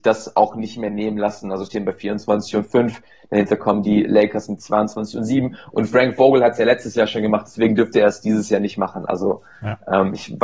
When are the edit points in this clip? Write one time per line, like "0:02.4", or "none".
none